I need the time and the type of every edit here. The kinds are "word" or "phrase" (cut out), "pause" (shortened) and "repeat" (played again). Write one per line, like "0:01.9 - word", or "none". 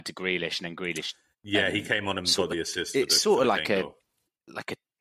none